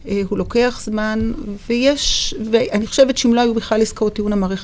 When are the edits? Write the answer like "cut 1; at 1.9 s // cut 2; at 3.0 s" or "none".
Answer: none